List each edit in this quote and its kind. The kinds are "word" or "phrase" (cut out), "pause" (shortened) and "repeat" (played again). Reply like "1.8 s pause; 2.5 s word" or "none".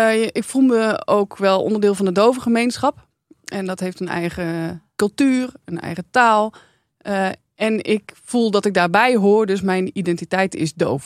none